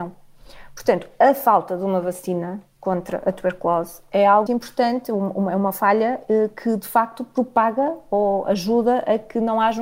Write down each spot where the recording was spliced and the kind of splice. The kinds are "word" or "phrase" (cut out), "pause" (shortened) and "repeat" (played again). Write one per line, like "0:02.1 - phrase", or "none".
0:04.5 - word